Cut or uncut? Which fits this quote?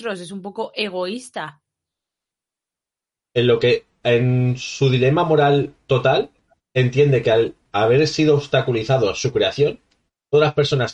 uncut